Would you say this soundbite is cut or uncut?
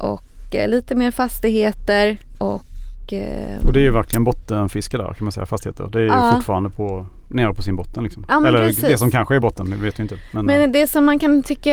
uncut